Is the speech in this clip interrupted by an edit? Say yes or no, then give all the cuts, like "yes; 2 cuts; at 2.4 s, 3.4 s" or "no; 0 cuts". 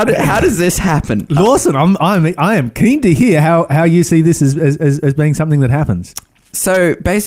no; 0 cuts